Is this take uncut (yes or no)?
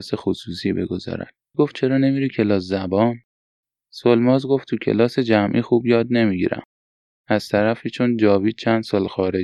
no